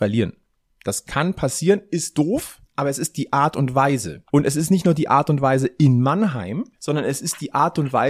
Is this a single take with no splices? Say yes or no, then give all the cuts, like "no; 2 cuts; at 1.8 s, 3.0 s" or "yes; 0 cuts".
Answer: no; 3 cuts; at 2.6 s, 4.3 s, 6.7 s